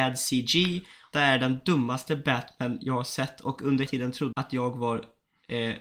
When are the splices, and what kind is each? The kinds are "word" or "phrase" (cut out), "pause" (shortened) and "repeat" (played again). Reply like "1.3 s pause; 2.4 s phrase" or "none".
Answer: 1.1 s word; 3.9 s word; 4.3 s word